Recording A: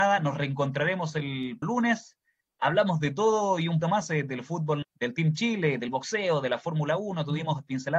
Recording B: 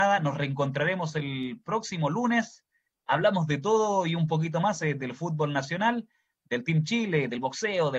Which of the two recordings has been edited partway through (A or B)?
A